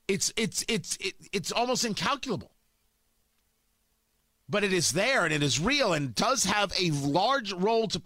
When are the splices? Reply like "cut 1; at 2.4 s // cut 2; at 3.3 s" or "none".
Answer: none